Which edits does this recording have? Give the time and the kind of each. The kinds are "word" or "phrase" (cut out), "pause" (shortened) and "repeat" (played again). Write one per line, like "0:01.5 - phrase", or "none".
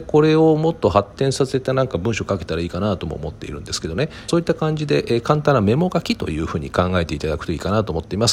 0:04.3 - phrase